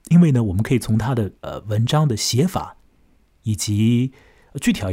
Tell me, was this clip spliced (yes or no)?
yes